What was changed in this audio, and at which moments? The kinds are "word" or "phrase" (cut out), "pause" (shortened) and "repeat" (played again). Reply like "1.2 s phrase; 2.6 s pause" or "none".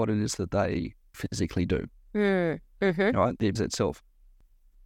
1.1 s word; 3.6 s word